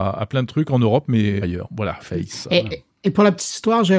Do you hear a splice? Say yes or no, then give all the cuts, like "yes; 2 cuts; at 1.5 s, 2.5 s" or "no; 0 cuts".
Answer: yes; 2 cuts; at 1.4 s, 2.0 s